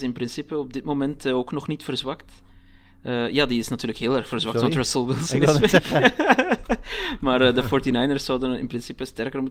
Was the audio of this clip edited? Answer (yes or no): no